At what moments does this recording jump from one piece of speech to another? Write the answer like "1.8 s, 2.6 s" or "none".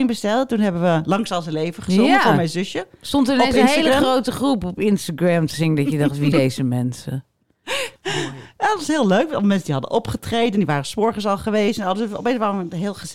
6.3 s, 8.0 s